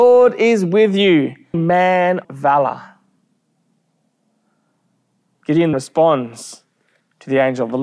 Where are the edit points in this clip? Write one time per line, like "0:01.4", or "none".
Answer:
0:01.5
0:02.2
0:05.7